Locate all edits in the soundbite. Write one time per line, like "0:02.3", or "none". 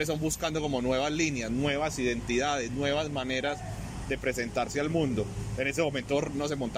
none